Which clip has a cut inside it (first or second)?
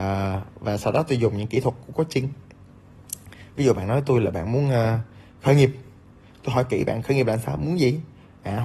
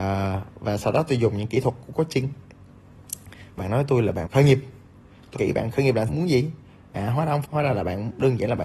second